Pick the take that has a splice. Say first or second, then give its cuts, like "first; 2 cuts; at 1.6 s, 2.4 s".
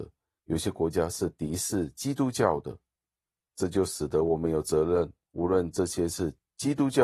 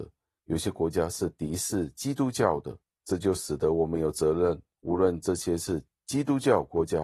second; 1 cut; at 2.8 s